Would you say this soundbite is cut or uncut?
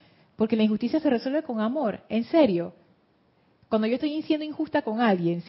uncut